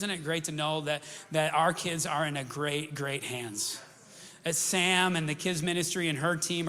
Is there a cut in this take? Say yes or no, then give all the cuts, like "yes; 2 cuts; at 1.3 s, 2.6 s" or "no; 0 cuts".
no; 0 cuts